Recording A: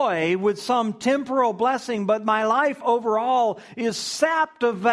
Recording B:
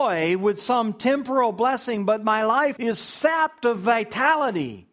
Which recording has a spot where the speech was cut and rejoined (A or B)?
B